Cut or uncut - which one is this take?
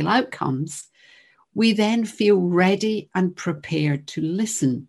uncut